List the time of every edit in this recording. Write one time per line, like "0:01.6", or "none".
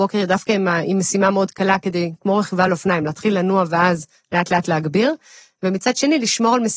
none